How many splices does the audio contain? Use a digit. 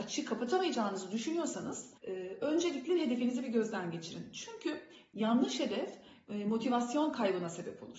1